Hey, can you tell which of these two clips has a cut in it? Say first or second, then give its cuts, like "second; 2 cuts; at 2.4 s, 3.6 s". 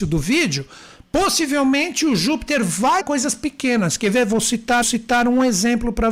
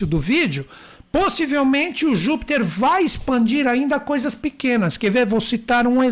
first; 2 cuts; at 3.0 s, 4.8 s